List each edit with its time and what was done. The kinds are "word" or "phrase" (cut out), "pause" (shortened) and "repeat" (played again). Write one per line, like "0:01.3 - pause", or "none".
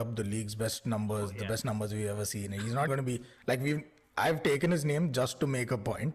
0:02.9 - word